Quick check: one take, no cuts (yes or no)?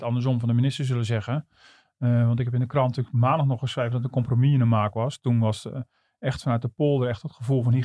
yes